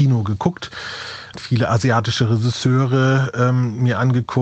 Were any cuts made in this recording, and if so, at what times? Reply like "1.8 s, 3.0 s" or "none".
1.3 s